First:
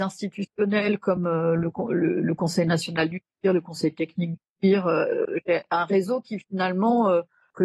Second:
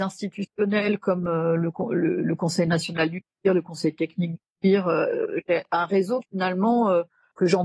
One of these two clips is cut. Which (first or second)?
second